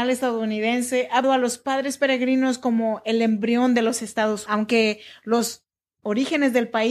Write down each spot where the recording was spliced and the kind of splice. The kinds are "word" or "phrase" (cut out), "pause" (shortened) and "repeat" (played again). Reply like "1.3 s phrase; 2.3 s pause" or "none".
1.2 s word; 4.5 s word